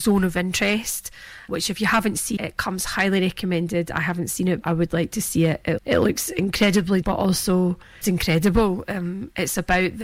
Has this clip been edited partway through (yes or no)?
yes